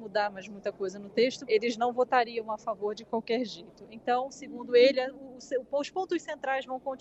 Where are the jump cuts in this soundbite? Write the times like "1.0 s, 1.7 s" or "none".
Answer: 1.5 s